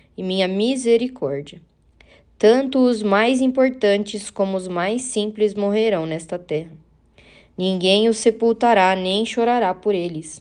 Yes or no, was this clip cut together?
no